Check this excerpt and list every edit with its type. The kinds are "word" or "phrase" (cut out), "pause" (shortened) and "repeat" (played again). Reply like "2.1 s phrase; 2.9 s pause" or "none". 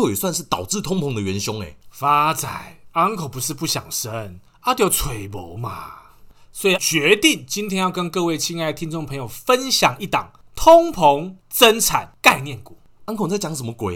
6.8 s word